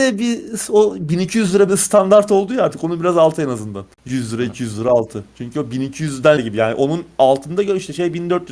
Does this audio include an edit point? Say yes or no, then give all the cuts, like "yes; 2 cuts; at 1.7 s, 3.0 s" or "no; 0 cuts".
yes; 2 cuts; at 3.9 s, 6.4 s